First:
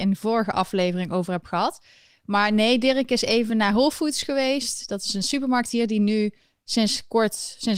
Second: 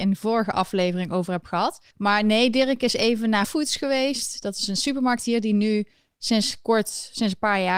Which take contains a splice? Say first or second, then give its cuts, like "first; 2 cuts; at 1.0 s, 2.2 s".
second; 2 cuts; at 1.9 s, 3.4 s